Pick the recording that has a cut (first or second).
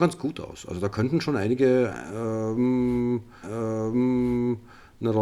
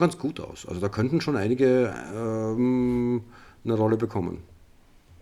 first